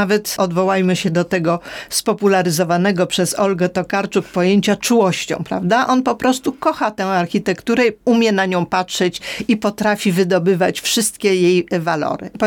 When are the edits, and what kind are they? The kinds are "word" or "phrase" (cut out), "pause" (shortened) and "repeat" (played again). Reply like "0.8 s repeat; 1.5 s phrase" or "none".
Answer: 8.0 s pause